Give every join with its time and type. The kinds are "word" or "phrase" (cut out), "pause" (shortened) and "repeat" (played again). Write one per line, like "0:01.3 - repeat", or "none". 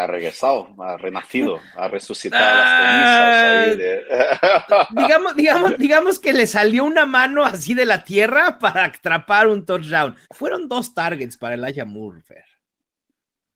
0:10.2 - pause